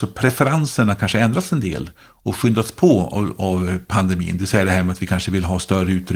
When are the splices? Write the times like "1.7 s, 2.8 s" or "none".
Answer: none